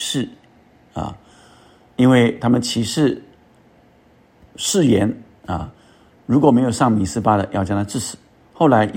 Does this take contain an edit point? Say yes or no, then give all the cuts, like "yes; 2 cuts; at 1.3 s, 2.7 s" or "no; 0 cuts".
no; 0 cuts